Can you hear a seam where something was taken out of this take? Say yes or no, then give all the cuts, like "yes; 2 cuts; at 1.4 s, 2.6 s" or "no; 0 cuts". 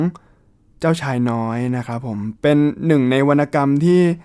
yes; 1 cut; at 2.4 s